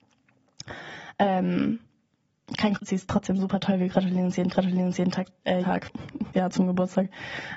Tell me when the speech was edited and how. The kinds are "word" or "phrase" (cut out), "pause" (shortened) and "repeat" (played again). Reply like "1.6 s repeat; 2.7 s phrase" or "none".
2.7 s phrase; 4.5 s repeat; 5.6 s word; 6.3 s word